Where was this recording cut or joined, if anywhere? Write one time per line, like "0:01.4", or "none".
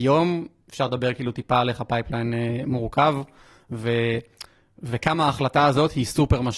none